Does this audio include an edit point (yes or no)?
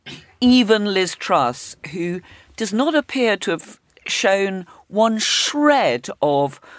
no